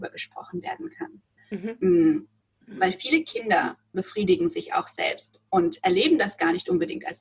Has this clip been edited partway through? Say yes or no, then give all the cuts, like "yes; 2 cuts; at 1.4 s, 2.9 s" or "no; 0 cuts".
yes; 1 cut; at 3.9 s